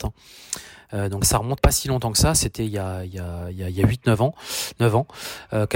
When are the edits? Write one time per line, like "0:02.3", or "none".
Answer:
0:01.2
0:01.6